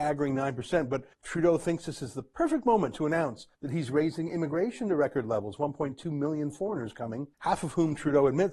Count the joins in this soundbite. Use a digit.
3